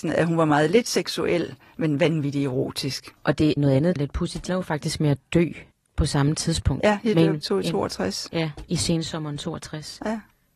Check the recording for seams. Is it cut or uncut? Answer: cut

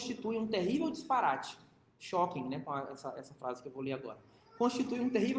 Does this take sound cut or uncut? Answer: uncut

